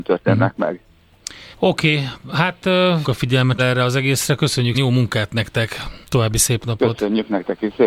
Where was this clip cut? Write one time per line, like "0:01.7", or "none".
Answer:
0:01.5
0:03.0
0:03.6
0:04.7
0:06.0